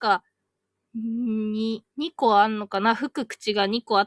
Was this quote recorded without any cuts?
no; 1 cut; at 1.9 s

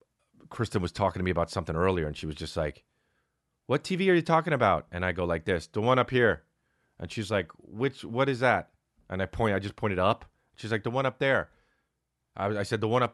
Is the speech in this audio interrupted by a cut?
no; 0 cuts

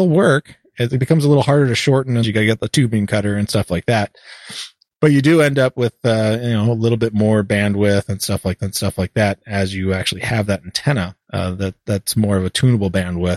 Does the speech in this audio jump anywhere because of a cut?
yes; 3 cuts; at 2.2 s, 8.6 s, 11.2 s

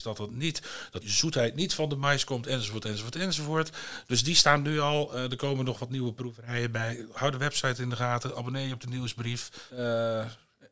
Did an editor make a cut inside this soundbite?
yes; 2 cuts; at 1.0 s, 9.7 s

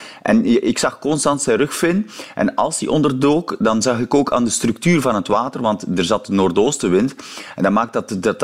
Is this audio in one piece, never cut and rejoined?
yes; 0 cuts

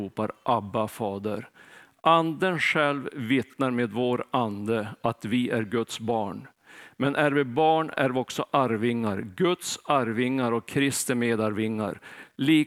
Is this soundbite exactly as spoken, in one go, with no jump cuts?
yes; 0 cuts

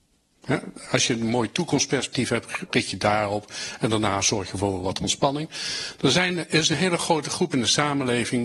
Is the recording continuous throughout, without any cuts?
yes; 0 cuts

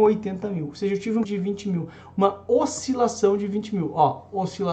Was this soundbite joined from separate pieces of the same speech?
yes; 1 cut; at 1.2 s

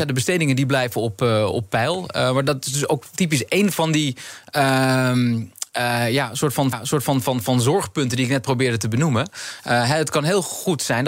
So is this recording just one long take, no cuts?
no; 1 cut; at 6.7 s

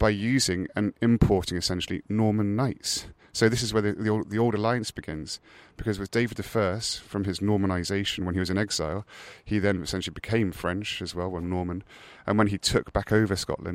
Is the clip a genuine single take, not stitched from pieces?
yes; 0 cuts

